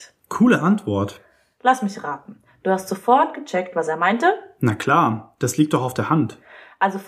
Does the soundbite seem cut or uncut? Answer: uncut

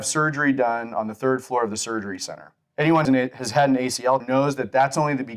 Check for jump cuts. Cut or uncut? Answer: cut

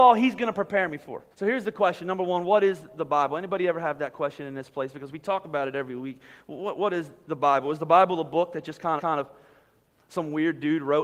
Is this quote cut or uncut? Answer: cut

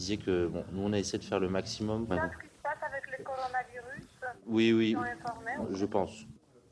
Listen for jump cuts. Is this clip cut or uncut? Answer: uncut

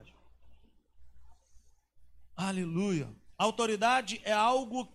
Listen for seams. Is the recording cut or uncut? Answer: uncut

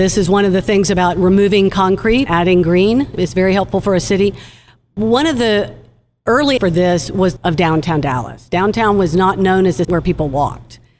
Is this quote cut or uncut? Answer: cut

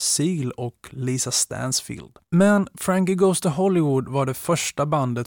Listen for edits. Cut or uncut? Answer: cut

